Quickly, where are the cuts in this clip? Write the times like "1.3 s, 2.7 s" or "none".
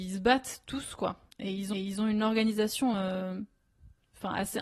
1.3 s, 1.7 s, 2.9 s